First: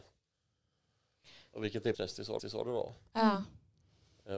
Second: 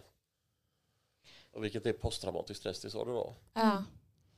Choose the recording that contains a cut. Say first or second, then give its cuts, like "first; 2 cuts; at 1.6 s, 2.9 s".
first; 2 cuts; at 1.9 s, 2.4 s